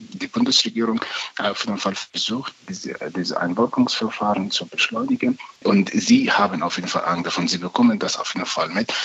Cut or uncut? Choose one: cut